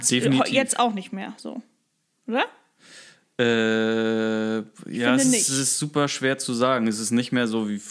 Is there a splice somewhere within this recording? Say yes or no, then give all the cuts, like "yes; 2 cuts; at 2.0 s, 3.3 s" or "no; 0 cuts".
no; 0 cuts